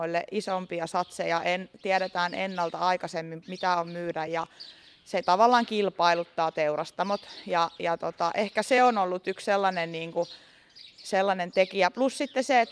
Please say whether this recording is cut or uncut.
uncut